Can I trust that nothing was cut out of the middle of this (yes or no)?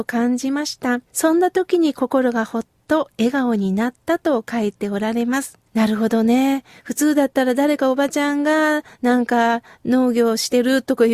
no